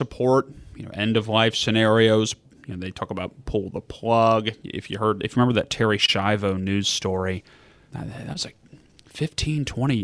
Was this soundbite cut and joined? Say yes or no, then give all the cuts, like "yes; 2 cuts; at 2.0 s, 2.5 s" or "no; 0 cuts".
no; 0 cuts